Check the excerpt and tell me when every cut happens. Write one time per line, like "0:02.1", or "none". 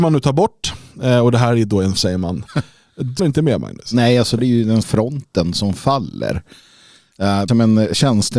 0:02.0
0:03.2
0:04.4
0:04.8
0:07.5